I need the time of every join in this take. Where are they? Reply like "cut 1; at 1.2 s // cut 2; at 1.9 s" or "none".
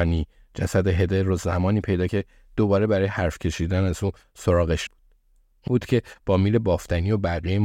cut 1; at 2.1 s // cut 2; at 4.9 s // cut 3; at 5.7 s